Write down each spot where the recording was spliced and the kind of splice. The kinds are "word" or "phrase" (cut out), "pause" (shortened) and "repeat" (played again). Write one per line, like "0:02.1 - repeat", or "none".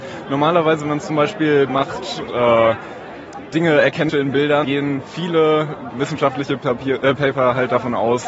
0:01.7 - word
0:02.3 - word
0:03.5 - word
0:04.1 - word
0:04.6 - word
0:05.9 - word